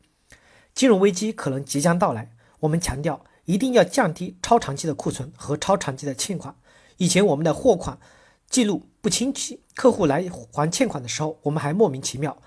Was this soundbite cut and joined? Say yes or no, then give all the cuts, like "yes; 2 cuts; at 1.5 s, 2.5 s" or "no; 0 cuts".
no; 0 cuts